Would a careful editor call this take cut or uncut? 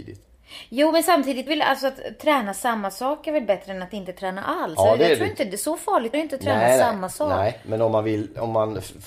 cut